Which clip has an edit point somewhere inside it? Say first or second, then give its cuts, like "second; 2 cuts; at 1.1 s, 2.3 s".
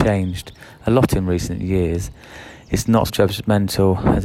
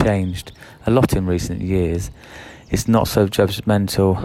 first; 1 cut; at 3.1 s